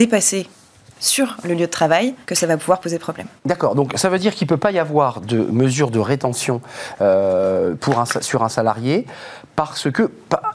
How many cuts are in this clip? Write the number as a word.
two